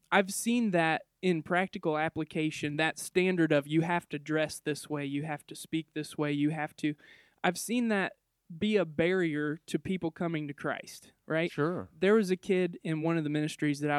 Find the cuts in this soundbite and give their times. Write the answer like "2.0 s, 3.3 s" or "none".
none